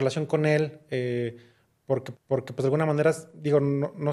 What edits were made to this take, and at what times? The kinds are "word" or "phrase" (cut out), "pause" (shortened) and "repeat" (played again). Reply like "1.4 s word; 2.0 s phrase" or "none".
2.1 s repeat